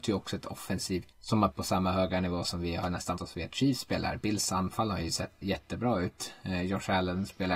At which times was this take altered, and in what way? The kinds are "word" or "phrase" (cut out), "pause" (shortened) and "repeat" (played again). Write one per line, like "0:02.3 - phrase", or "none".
0:01.1 - word
0:01.5 - word
0:03.2 - word
0:05.4 - word

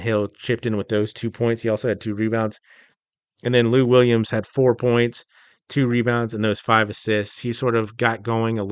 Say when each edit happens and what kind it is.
none

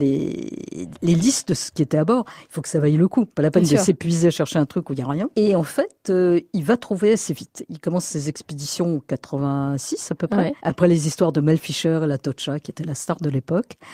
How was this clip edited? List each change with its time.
0:03.3 - pause
0:05.3 - pause
0:10.6 - pause

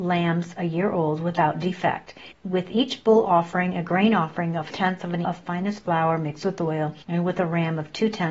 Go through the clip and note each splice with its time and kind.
0:02.3 - pause
0:04.7 - word
0:05.2 - word
0:07.0 - pause

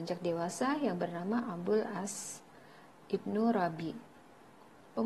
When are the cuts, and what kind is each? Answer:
none

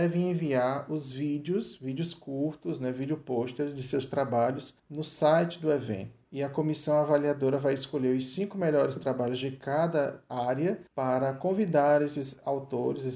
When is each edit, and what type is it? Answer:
0:04.8 - pause
0:06.3 - pause
0:10.9 - pause

